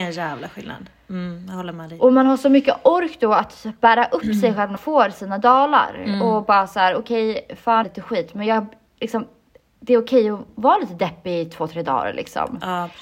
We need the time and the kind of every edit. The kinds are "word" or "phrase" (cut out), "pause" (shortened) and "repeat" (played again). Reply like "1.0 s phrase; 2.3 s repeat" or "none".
4.8 s word; 7.8 s phrase; 10.5 s word